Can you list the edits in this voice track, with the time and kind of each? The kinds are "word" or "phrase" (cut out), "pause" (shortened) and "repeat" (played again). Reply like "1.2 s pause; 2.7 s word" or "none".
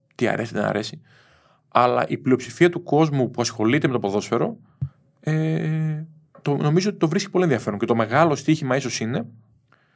none